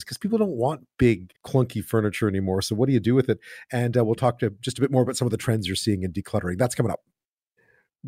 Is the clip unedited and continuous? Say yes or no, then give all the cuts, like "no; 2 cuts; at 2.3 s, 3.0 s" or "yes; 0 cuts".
no; 1 cut; at 1.4 s